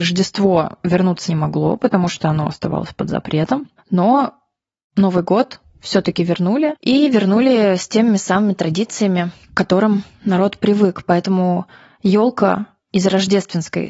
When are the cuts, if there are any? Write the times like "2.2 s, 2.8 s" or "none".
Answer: 1.3 s, 9.4 s